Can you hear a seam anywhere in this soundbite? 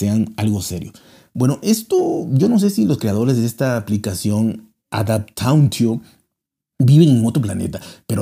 no; 0 cuts

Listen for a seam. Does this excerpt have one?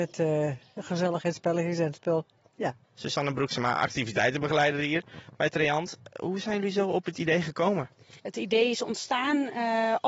yes; 2 cuts; at 2.8 s, 8.2 s

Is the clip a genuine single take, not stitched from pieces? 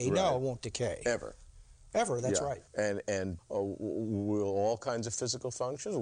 no; 2 cuts; at 2.7 s, 3.4 s

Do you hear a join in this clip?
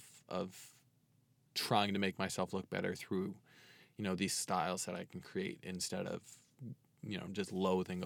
no; 0 cuts

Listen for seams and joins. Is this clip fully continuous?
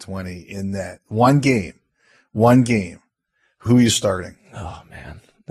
yes; 0 cuts

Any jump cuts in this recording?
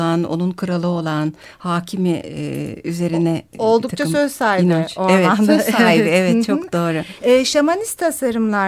no; 0 cuts

